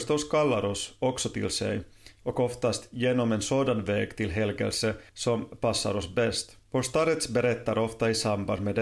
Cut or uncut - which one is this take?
cut